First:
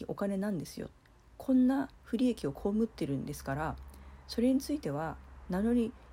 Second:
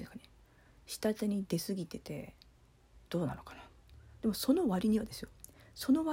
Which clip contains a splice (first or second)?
second